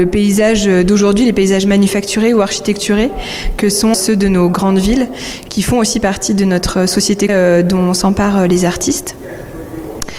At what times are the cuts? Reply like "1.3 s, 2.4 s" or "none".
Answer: 3.9 s, 7.3 s